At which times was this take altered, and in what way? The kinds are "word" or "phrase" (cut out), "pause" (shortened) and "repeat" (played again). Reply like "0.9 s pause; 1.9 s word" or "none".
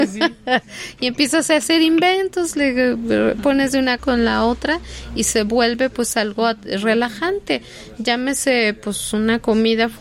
4.0 s word